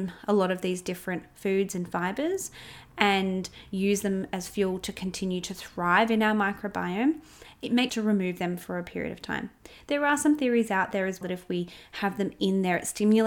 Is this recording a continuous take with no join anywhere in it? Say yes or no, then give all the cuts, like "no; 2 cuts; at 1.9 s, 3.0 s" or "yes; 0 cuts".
no; 2 cuts; at 7.9 s, 11.2 s